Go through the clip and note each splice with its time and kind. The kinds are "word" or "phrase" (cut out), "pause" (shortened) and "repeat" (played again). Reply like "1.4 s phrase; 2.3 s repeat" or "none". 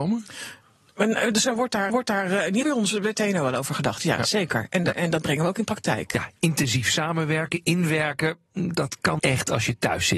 1.9 s repeat; 2.6 s word; 9.2 s word